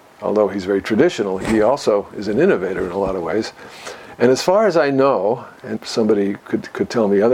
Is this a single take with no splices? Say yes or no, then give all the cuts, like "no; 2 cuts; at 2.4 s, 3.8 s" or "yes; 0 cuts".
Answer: no; 2 cuts; at 1.4 s, 5.8 s